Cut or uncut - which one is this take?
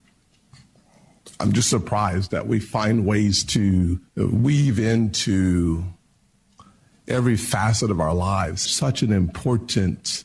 cut